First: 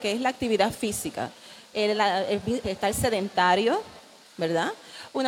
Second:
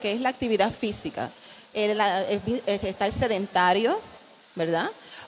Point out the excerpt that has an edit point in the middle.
first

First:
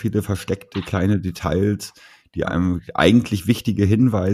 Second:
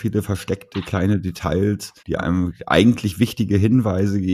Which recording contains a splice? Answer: second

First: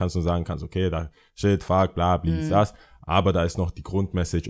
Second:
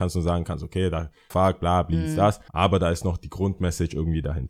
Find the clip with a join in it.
second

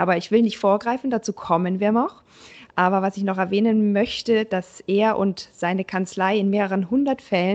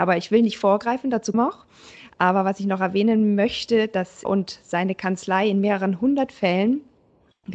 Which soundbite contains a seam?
second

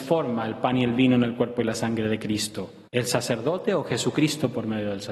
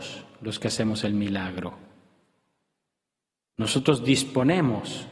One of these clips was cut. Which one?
first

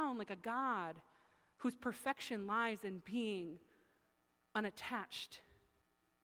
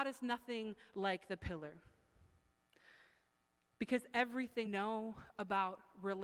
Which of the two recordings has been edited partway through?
second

